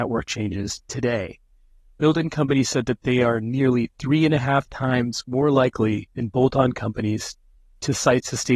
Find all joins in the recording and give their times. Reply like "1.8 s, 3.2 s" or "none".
6.1 s